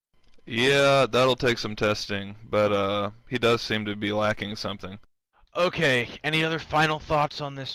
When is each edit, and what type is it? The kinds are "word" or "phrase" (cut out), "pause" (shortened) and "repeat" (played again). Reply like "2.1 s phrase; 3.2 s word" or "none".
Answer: none